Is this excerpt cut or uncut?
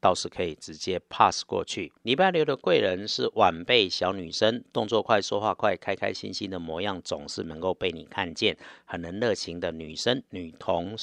cut